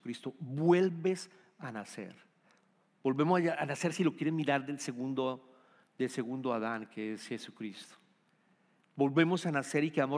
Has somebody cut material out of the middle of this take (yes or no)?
no